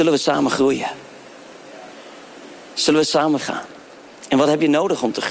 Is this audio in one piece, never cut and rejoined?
no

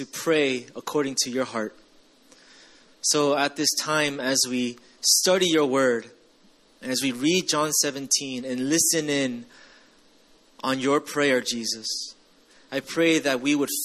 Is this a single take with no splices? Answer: yes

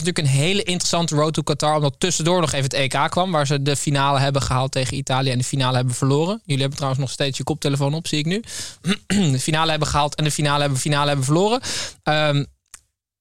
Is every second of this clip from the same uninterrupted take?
no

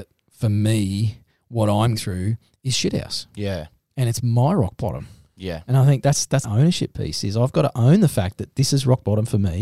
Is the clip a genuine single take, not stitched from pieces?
no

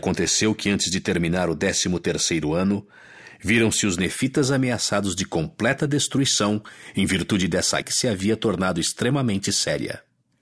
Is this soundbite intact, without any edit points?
no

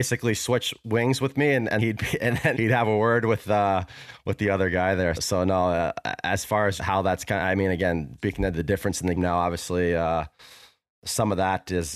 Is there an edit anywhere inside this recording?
yes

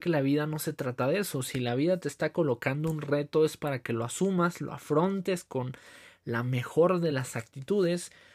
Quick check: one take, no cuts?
yes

